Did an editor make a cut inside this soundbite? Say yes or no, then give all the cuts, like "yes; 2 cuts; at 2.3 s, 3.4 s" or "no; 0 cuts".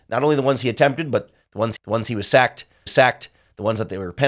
yes; 2 cuts; at 1.8 s, 2.9 s